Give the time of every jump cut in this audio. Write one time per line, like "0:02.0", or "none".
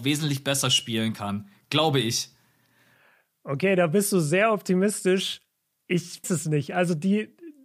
0:06.2